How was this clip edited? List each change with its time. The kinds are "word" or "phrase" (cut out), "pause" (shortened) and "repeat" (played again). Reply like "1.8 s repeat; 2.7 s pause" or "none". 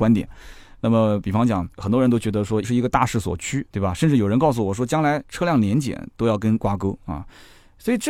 1.7 s pause; 2.6 s word; 3.7 s pause; 6.6 s word